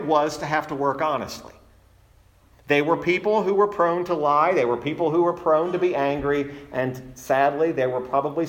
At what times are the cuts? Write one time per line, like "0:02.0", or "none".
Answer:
none